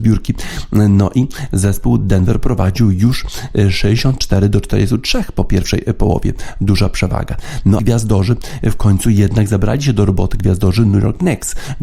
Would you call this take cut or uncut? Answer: cut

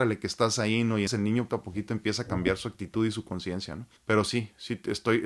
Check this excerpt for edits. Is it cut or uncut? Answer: cut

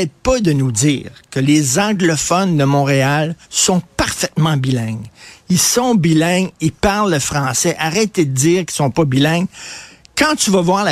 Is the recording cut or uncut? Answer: cut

